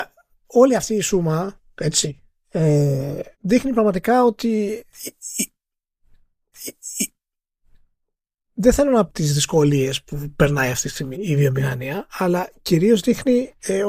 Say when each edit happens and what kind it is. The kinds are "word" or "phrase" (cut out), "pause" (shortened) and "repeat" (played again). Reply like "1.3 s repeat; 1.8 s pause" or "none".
3.3 s pause; 6.5 s repeat; 9.1 s word; 11.1 s word